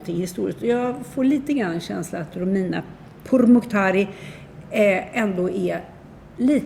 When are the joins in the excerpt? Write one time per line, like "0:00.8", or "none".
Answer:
none